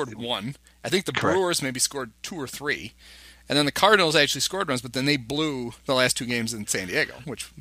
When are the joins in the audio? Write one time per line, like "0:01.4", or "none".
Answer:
none